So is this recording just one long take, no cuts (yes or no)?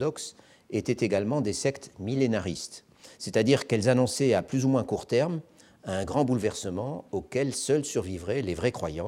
yes